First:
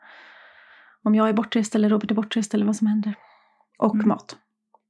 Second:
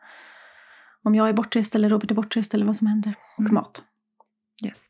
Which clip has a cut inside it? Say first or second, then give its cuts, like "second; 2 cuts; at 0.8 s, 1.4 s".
second; 1 cut; at 3.4 s